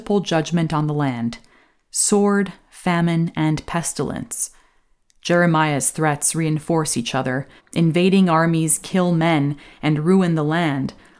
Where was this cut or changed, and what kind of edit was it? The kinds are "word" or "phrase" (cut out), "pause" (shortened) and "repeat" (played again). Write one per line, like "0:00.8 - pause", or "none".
0:07.6 - pause